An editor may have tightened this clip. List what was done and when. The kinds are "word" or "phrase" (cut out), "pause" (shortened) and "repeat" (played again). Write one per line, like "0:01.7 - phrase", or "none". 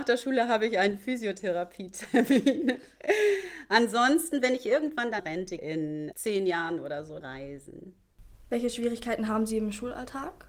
0:05.2 - word
0:05.6 - word
0:06.1 - word
0:07.2 - phrase